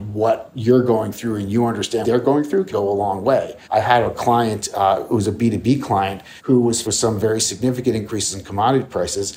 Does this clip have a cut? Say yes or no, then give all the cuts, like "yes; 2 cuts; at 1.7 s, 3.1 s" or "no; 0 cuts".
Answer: yes; 5 cuts; at 2.0 s, 2.7 s, 3.6 s, 6.4 s, 6.8 s